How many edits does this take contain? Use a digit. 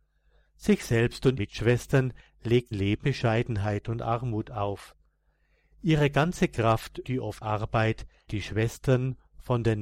6